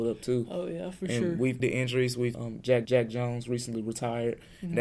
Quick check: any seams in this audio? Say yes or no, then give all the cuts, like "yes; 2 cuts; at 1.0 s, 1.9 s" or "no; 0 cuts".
yes; 3 cuts; at 1.6 s, 2.3 s, 2.8 s